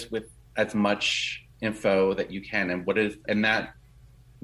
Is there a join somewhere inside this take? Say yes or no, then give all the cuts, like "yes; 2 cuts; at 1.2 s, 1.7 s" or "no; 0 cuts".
yes; 2 cuts; at 1.5 s, 3.3 s